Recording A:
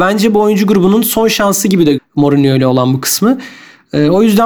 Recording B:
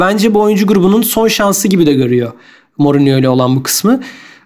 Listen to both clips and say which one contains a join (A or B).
A